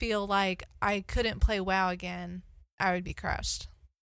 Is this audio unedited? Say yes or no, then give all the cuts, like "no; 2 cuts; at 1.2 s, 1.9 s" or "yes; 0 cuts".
yes; 0 cuts